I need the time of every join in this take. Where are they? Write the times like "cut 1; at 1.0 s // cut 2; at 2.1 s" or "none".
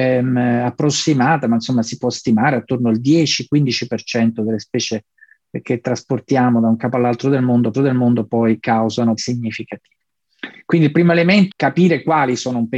cut 1; at 7.7 s // cut 2; at 9.2 s // cut 3; at 11.5 s